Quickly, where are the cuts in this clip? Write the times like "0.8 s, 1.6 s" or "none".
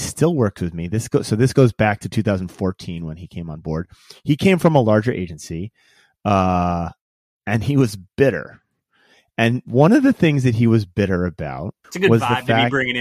11.8 s